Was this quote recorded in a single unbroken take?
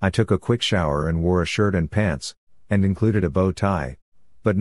yes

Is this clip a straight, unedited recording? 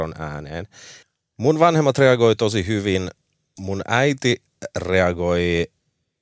yes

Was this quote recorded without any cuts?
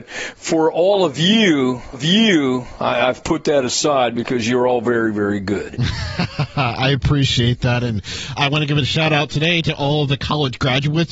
no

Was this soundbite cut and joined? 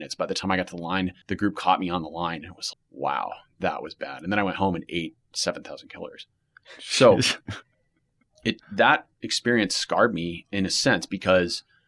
yes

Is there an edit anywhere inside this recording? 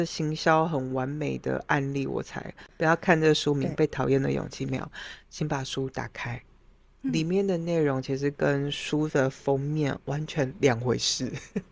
no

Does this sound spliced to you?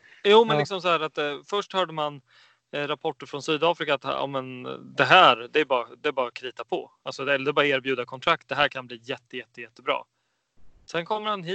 no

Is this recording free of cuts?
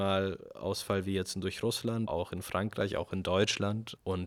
no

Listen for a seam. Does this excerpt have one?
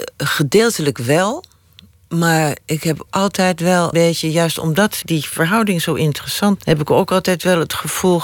yes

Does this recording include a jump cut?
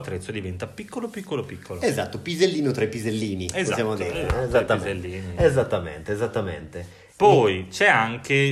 no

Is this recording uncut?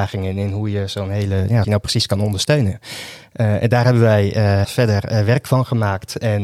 no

